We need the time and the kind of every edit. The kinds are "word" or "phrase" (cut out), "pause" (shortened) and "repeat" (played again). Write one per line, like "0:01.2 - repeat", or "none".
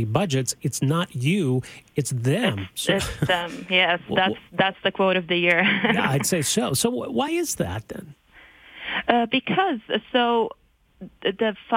none